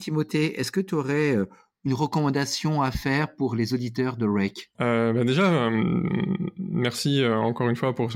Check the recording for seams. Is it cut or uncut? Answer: uncut